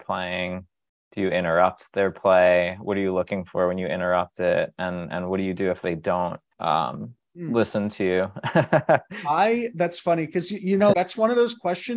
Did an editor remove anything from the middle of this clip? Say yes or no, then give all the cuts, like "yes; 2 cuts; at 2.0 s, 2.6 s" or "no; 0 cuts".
yes; 2 cuts; at 6.5 s, 10.9 s